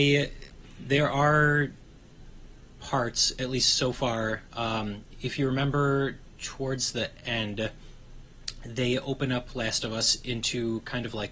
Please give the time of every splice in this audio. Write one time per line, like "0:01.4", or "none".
none